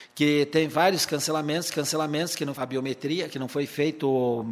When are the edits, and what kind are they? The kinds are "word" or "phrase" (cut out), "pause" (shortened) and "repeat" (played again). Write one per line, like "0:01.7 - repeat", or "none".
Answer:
0:01.7 - repeat
0:02.5 - word